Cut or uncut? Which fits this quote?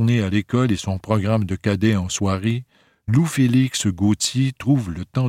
uncut